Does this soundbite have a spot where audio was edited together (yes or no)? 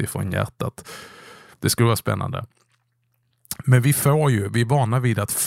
no